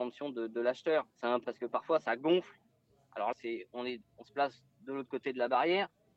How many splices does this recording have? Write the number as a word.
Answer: three